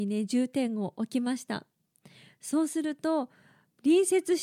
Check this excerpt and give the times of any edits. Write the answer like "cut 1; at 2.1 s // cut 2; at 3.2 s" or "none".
none